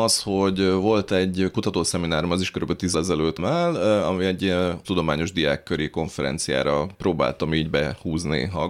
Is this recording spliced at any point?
yes; 3 cuts; at 2.9 s, 3.4 s, 4.8 s

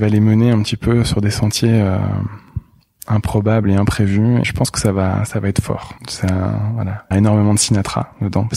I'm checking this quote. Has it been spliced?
yes; 3 cuts; at 4.4 s, 6.0 s, 7.1 s

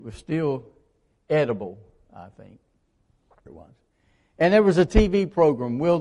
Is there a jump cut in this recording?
yes; 1 cut; at 3.5 s

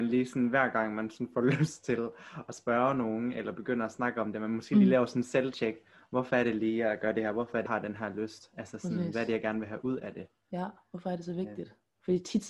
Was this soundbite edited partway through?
yes; 1 cut; at 7.7 s

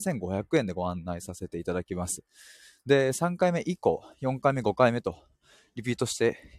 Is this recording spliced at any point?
no; 0 cuts

